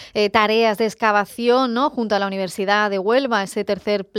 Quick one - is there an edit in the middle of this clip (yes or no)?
no